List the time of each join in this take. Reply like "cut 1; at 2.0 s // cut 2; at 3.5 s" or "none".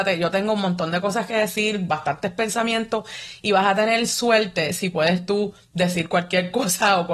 none